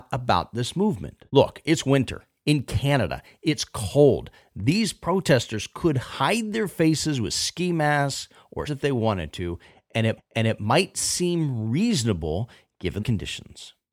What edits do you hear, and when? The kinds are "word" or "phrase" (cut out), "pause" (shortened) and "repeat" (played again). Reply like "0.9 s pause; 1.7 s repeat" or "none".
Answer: 1.3 s pause; 8.7 s word; 10.2 s repeat; 13.0 s phrase